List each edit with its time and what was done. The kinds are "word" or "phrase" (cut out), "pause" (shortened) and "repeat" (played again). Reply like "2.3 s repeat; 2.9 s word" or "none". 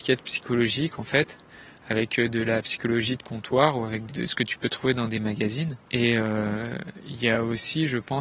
4.1 s phrase; 5.8 s pause